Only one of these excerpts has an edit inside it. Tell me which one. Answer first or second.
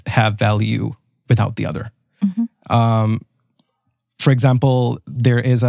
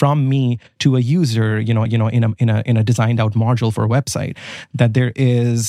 second